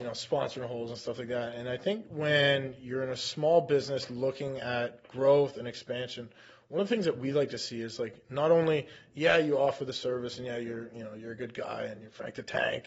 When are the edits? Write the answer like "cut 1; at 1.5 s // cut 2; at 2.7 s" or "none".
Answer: none